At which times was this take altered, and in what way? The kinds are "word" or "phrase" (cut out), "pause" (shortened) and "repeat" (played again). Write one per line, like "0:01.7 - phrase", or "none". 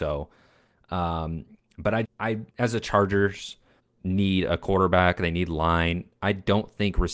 0:02.0 - word
0:02.5 - pause
0:03.8 - pause